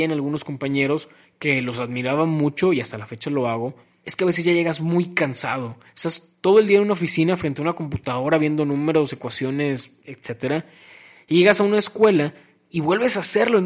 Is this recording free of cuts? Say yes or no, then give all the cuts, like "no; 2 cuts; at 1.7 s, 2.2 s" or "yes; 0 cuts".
yes; 0 cuts